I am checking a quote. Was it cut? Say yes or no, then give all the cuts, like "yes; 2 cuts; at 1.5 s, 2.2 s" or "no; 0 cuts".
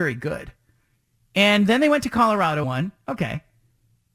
yes; 1 cut; at 2.6 s